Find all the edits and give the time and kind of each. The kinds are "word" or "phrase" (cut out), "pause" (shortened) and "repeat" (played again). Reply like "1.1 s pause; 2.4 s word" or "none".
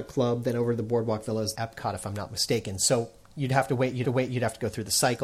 1.5 s word; 4.0 s repeat